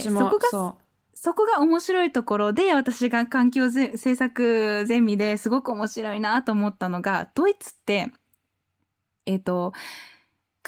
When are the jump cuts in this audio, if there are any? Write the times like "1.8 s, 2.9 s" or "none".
none